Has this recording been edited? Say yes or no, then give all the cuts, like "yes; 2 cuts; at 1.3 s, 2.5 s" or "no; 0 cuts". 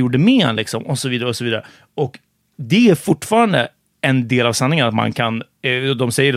no; 0 cuts